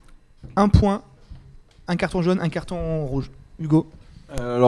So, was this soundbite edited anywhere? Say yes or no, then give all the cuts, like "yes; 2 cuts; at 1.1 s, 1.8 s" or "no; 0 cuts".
no; 0 cuts